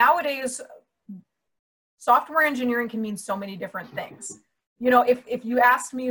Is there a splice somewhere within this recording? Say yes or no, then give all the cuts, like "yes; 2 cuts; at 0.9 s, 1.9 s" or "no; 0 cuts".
no; 0 cuts